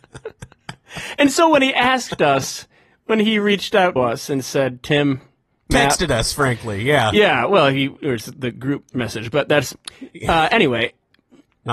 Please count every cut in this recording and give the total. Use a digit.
2